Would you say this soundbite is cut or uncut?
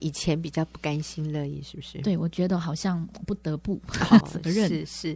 cut